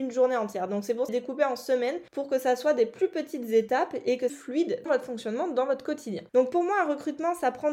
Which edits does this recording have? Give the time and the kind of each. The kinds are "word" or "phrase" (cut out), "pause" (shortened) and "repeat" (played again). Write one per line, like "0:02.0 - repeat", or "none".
0:01.1 - phrase
0:02.1 - pause
0:04.3 - phrase
0:04.9 - word
0:06.3 - pause